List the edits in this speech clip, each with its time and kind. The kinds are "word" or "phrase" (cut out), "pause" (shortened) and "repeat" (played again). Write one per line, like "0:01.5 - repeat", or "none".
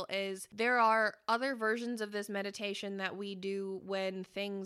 none